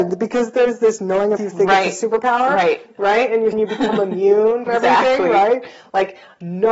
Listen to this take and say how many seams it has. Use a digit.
3